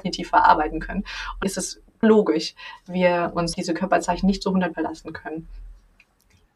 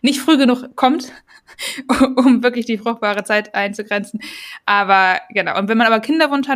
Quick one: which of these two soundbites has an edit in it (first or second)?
first